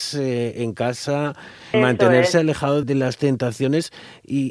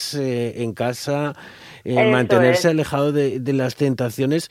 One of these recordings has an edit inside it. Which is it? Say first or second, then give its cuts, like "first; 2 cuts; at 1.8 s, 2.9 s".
first; 2 cuts; at 1.7 s, 2.8 s